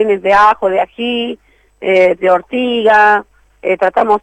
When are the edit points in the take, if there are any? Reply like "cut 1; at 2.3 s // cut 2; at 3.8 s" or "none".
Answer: cut 1; at 2.2 s